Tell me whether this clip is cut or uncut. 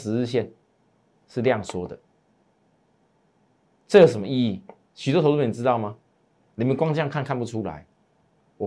uncut